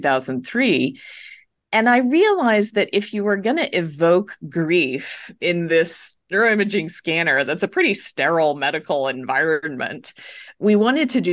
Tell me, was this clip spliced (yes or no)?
yes